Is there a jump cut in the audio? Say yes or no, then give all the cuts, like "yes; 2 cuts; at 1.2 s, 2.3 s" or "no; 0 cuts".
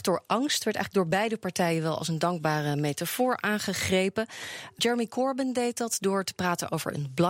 yes; 1 cut; at 4.8 s